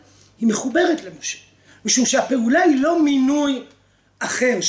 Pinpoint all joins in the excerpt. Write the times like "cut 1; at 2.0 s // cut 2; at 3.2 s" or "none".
none

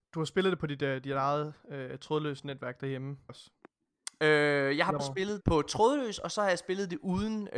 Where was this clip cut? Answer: cut 1; at 3.3 s // cut 2; at 5.0 s // cut 3; at 5.4 s

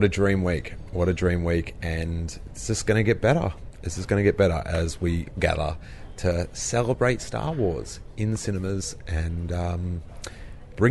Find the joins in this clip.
cut 1; at 5.4 s

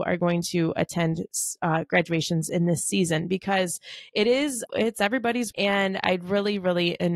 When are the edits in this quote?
cut 1; at 4.7 s // cut 2; at 5.5 s

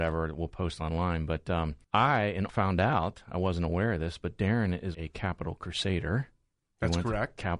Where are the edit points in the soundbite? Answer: cut 1; at 1.8 s // cut 2; at 2.5 s // cut 3; at 4.9 s

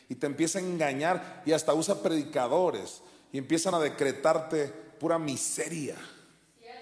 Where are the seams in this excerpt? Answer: none

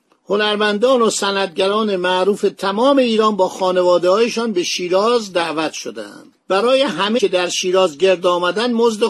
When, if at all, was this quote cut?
cut 1; at 6.4 s // cut 2; at 7.2 s

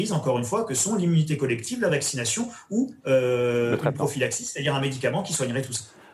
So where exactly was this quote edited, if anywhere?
none

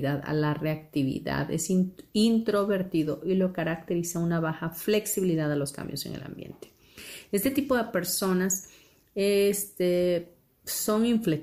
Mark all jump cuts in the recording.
none

